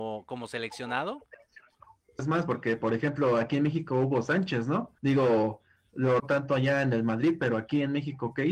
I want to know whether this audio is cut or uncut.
cut